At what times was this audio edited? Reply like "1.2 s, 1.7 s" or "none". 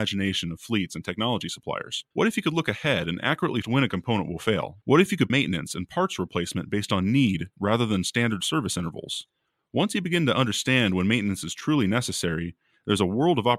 2.1 s, 3.6 s, 4.8 s, 5.3 s